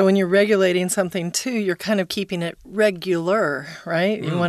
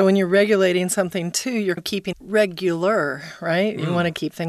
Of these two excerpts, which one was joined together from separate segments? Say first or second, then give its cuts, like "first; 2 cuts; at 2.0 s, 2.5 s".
second; 2 cuts; at 1.8 s, 2.1 s